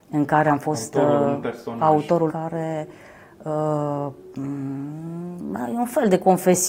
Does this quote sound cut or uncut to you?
cut